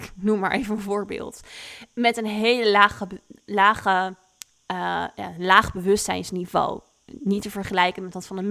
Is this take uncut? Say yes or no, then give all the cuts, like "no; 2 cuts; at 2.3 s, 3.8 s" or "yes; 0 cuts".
yes; 0 cuts